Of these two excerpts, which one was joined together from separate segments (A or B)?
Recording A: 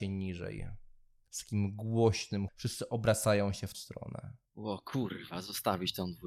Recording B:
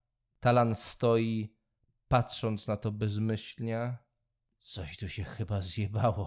A